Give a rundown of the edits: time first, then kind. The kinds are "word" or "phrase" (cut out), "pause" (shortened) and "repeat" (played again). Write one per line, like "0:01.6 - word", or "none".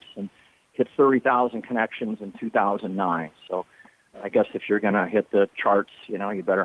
none